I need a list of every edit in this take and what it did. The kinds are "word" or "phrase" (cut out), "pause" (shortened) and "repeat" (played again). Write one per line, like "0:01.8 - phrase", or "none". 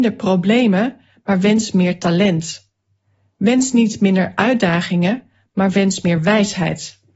none